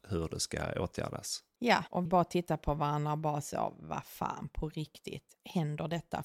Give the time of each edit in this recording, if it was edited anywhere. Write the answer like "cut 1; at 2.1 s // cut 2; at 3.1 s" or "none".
cut 1; at 2.1 s